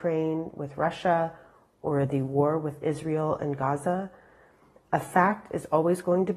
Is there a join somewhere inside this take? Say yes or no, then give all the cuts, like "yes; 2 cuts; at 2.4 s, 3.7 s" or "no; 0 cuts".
no; 0 cuts